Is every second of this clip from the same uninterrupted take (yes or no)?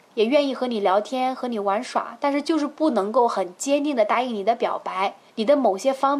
no